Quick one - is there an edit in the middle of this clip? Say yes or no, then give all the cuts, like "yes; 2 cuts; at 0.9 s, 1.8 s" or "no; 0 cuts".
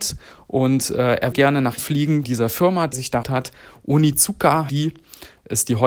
yes; 6 cuts; at 1.3 s, 1.8 s, 2.2 s, 2.9 s, 3.2 s, 4.7 s